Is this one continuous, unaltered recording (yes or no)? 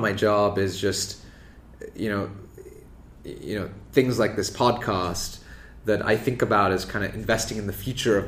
no